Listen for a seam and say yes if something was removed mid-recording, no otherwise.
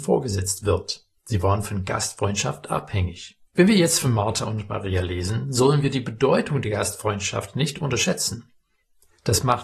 yes